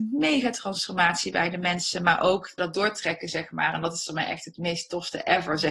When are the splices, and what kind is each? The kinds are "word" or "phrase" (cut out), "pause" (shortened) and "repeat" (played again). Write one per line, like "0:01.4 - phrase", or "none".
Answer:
0:02.6 - phrase